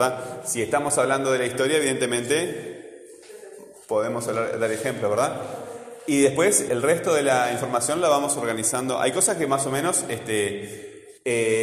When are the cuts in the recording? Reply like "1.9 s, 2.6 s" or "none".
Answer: 6.7 s